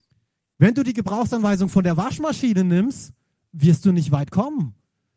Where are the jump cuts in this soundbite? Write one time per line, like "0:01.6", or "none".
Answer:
none